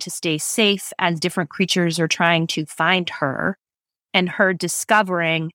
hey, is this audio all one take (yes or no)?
yes